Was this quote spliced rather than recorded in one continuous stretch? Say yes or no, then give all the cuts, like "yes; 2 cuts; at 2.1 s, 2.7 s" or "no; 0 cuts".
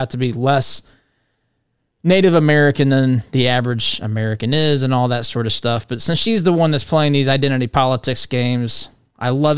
no; 0 cuts